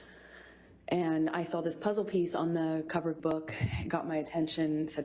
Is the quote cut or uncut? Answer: uncut